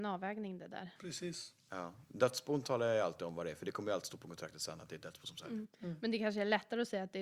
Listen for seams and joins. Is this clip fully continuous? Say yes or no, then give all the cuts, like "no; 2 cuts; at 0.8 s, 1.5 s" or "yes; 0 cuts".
no; 1 cut; at 5.7 s